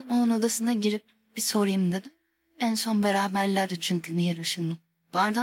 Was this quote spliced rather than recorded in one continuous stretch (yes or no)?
no